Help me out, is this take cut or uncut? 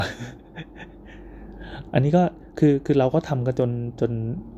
cut